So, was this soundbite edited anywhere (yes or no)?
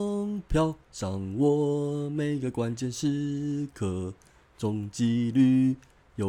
no